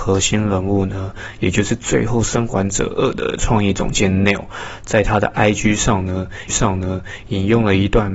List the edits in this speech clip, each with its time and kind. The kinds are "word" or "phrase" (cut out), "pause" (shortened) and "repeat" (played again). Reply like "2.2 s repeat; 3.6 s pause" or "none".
6.5 s repeat